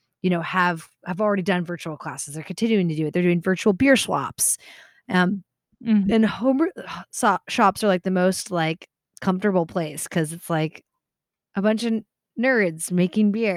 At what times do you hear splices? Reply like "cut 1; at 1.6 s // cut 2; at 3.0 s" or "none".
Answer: none